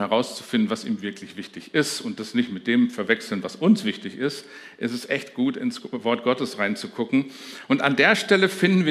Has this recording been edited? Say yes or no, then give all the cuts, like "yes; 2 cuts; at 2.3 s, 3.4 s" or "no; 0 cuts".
no; 0 cuts